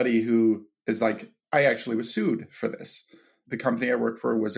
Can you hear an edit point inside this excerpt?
no; 0 cuts

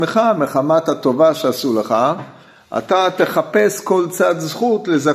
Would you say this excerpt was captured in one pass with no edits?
yes; 0 cuts

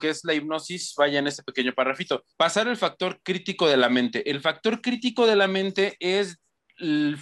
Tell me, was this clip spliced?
yes; 1 cut; at 2.3 s

